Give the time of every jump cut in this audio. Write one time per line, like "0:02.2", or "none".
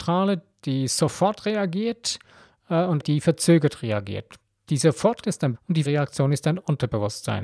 0:03.0
0:05.2
0:05.5
0:05.8